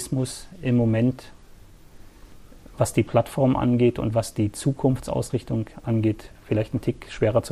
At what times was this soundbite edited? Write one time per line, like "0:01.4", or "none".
none